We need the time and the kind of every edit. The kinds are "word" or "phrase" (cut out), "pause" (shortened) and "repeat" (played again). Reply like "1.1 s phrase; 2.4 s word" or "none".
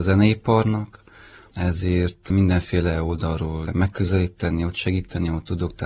3.7 s word